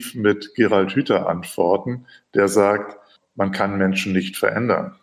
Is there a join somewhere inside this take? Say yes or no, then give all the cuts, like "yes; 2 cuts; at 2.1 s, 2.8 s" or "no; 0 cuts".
no; 0 cuts